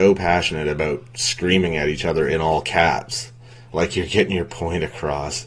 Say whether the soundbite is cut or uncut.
uncut